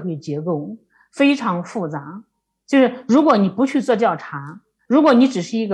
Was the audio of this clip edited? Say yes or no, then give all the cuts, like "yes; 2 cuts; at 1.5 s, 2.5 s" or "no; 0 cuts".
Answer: no; 0 cuts